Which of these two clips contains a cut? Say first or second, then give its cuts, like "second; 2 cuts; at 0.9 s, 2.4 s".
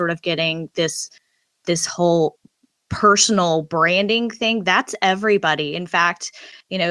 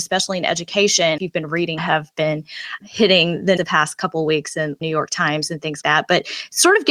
second; 6 cuts; at 1.2 s, 1.8 s, 2.8 s, 3.6 s, 4.8 s, 5.8 s